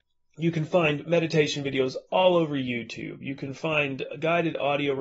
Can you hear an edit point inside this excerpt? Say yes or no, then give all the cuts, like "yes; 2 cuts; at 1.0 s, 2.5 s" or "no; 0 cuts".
no; 0 cuts